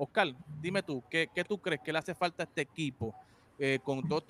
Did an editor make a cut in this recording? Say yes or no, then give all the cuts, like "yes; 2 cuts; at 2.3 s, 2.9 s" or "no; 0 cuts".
no; 0 cuts